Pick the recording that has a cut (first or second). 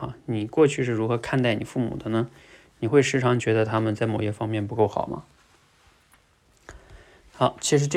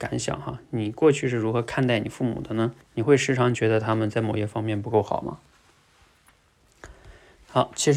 second